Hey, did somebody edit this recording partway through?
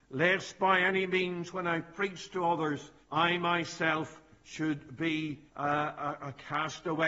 yes; 2 cuts; at 3.0 s, 5.5 s

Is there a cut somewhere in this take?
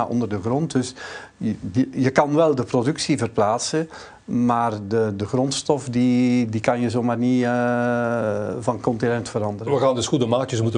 no; 0 cuts

